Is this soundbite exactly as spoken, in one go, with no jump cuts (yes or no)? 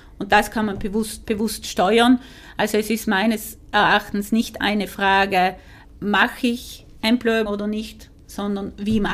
no